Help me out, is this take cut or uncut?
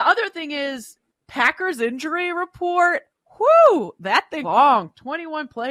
cut